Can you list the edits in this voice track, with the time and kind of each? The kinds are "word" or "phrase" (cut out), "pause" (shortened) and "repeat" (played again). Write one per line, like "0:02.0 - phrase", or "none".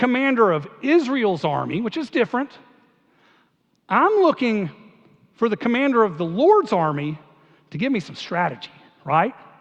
none